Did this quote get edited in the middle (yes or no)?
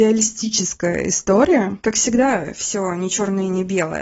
no